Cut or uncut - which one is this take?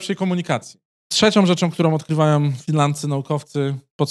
uncut